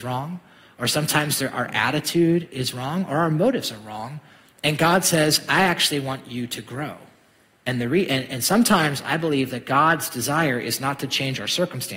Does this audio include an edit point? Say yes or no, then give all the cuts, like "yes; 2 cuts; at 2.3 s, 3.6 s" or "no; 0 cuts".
no; 0 cuts